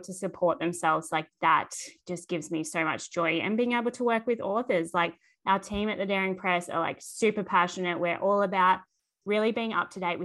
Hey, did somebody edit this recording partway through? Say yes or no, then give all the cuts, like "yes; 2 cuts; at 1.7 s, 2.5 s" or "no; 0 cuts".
no; 0 cuts